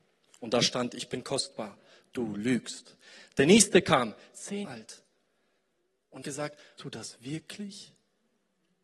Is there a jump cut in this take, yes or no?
yes